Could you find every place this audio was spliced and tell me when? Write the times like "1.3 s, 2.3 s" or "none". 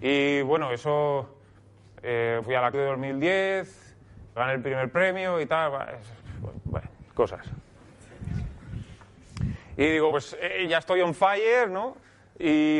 2.4 s, 2.7 s, 4.4 s, 10.1 s, 10.7 s